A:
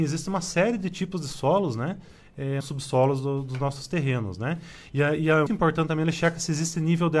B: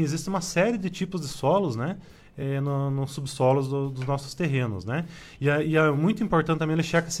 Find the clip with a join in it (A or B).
A